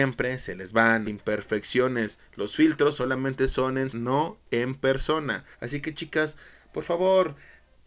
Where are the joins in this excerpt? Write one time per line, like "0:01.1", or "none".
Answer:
0:01.0
0:03.9
0:05.5